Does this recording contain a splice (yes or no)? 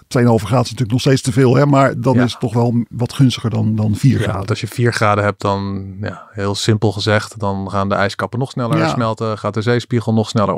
no